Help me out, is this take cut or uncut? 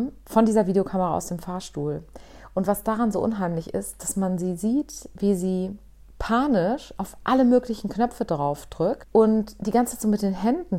uncut